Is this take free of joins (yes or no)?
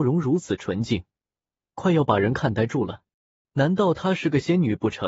yes